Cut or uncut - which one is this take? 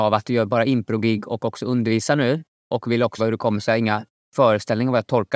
cut